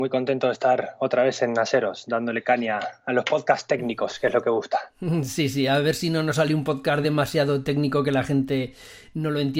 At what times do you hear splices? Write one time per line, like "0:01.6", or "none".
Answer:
none

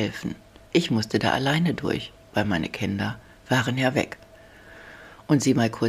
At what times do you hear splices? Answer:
none

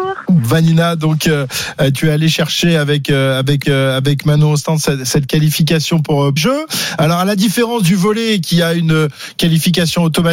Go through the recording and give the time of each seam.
0:03.6
0:06.4

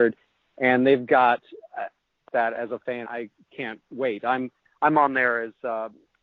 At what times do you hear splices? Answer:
0:02.3
0:03.0

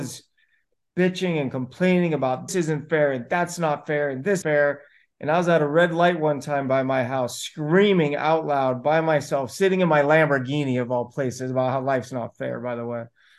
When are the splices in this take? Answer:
0:02.5
0:04.4

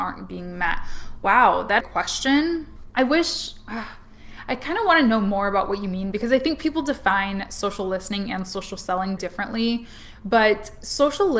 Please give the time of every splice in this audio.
0:01.8
0:09.2

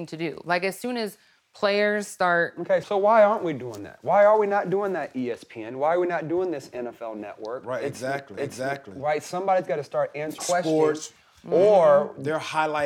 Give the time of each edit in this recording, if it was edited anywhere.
0:02.8
0:08.4
0:10.4

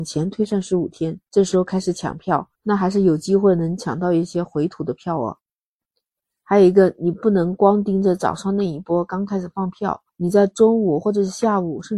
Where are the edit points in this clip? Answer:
0:01.3
0:02.5
0:10.1

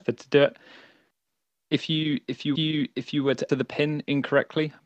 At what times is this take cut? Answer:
0:02.6
0:03.5

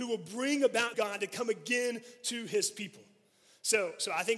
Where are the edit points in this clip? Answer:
0:00.9

